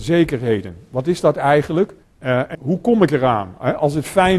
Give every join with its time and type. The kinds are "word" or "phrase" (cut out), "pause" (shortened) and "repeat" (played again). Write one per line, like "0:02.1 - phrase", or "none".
0:02.0 - pause
0:02.5 - word